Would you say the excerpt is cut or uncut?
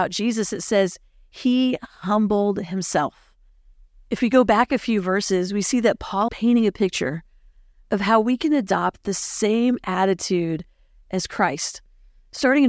cut